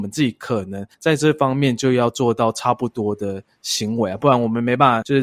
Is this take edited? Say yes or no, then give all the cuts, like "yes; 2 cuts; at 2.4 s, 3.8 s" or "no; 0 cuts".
yes; 1 cut; at 0.9 s